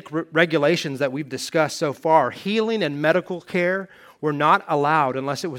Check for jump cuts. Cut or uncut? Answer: uncut